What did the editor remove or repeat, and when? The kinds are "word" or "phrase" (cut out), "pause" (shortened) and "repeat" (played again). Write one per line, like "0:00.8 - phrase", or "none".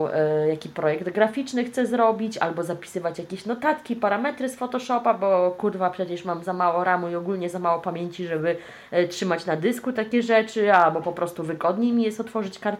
none